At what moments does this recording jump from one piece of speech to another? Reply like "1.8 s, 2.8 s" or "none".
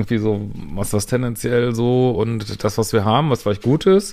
1.1 s